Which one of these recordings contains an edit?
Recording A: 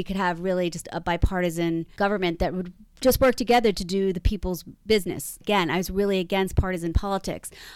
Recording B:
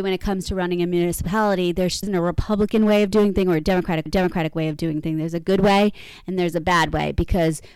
B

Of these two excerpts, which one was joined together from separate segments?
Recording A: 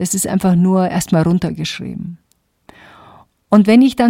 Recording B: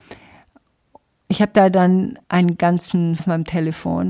B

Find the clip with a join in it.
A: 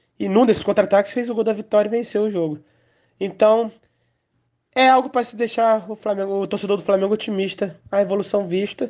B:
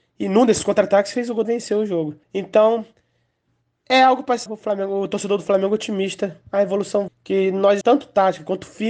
B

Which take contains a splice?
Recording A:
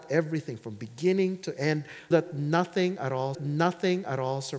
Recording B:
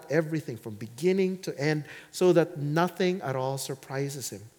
A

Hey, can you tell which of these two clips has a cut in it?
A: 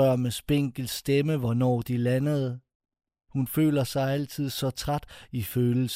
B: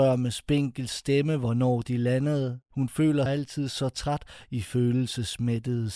B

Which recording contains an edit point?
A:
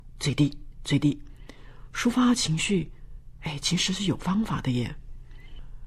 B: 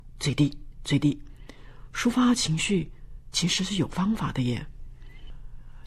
B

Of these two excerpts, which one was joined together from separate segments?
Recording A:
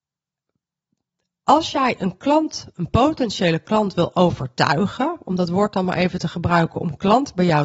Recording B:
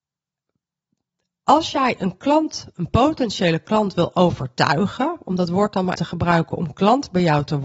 B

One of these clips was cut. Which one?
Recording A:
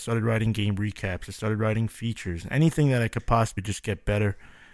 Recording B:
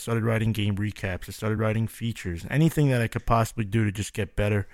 A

